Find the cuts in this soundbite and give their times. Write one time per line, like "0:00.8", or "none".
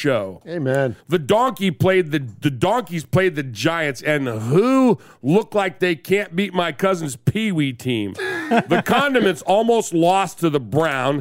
0:01.0